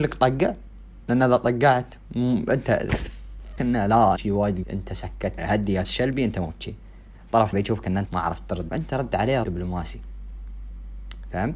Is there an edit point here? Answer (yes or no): yes